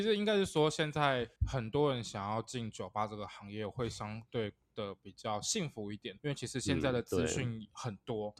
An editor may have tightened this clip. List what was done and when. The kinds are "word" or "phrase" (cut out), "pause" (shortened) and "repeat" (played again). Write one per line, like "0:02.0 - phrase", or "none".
0:01.4 - pause
0:06.2 - pause